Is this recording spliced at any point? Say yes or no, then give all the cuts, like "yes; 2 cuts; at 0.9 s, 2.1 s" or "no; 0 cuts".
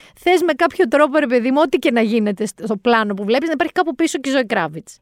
no; 0 cuts